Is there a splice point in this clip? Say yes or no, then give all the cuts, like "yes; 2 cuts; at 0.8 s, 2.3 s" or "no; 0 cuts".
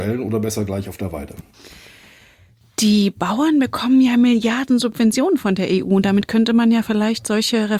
no; 0 cuts